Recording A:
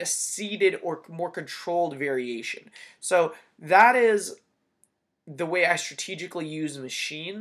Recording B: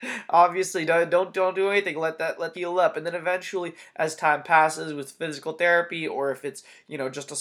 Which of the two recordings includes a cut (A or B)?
B